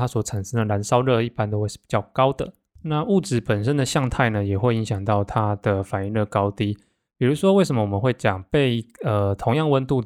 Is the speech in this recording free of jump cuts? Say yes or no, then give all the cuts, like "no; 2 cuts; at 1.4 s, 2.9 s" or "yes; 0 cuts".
yes; 0 cuts